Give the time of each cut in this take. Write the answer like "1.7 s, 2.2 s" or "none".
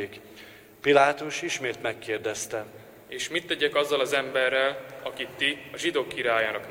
none